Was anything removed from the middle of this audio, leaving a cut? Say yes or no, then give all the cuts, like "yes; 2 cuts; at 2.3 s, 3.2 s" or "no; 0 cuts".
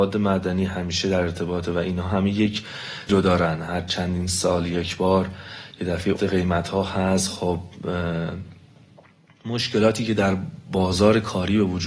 yes; 2 cuts; at 3.1 s, 6.2 s